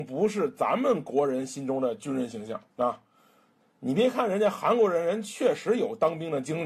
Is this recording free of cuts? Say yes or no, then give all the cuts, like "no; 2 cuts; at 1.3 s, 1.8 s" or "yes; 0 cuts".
no; 1 cut; at 2.7 s